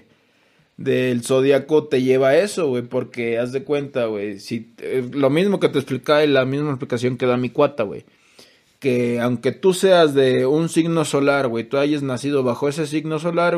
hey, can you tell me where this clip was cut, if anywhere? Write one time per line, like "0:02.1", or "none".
none